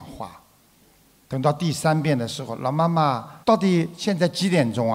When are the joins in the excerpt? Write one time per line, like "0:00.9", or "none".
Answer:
0:03.4